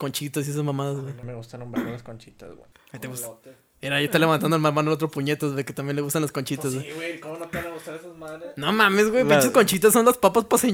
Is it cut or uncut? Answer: uncut